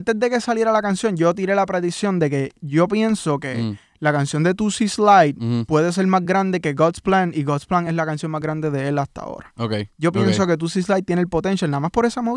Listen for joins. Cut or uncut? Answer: uncut